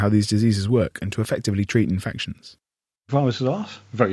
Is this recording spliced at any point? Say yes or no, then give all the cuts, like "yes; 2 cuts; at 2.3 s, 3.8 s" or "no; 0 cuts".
no; 0 cuts